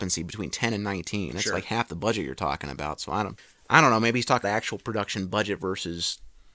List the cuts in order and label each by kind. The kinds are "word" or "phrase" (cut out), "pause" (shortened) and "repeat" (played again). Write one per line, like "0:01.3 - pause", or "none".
0:04.4 - word